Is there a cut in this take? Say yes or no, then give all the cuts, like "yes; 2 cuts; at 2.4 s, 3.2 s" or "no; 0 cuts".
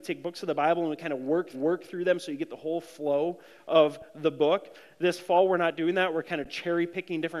yes; 1 cut; at 1.5 s